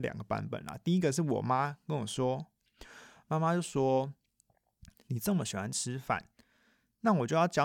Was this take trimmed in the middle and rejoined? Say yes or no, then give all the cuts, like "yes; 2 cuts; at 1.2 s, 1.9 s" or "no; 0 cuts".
no; 0 cuts